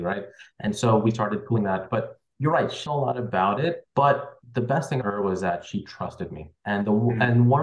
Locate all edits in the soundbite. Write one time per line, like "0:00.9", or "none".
0:02.9
0:05.0
0:06.6